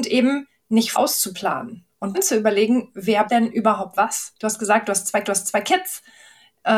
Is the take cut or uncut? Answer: cut